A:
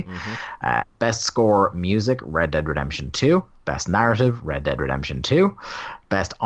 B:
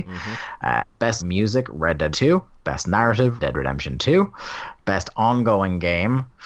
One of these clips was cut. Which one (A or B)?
B